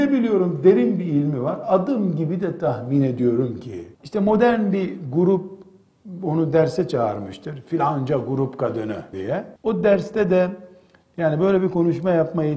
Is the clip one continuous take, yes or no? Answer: no